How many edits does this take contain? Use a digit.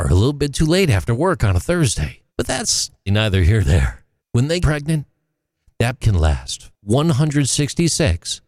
6